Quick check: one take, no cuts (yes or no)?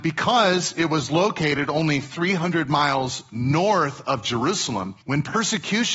no